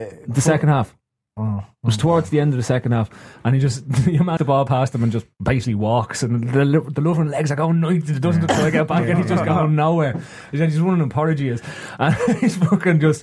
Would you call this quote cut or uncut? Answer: cut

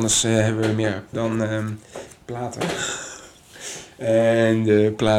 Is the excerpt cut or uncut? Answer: cut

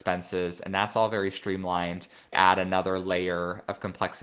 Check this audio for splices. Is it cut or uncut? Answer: cut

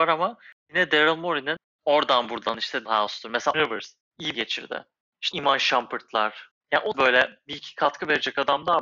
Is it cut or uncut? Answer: cut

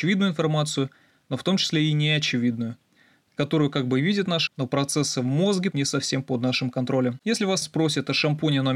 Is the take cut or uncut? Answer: cut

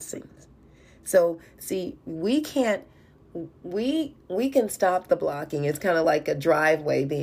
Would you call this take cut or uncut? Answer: uncut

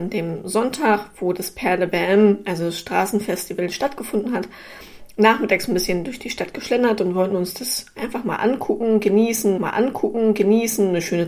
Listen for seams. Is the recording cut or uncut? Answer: cut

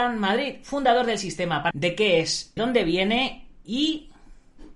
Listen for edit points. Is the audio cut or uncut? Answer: cut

